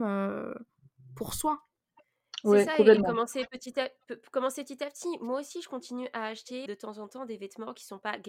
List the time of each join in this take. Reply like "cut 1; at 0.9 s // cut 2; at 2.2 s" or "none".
cut 1; at 6.7 s